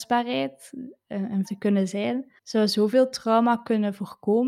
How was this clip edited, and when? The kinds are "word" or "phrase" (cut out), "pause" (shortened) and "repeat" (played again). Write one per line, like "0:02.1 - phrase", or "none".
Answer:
0:01.4 - phrase
0:02.4 - pause